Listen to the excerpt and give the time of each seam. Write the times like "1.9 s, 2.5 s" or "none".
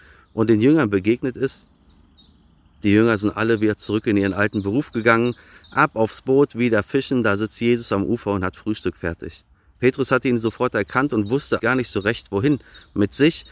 11.6 s